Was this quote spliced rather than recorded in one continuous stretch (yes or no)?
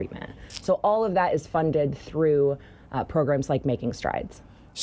no